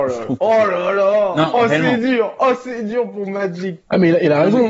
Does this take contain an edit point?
no; 0 cuts

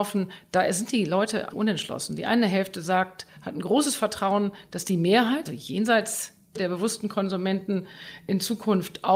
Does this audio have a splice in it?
yes; 3 cuts; at 1.5 s, 5.5 s, 6.6 s

